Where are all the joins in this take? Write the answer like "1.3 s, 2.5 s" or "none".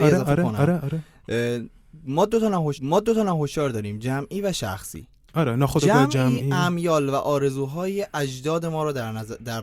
2.7 s